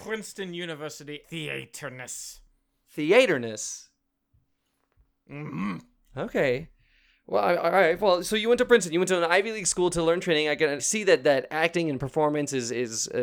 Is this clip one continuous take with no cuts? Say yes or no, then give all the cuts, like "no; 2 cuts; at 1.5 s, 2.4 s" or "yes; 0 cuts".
no; 2 cuts; at 1.2 s, 10.8 s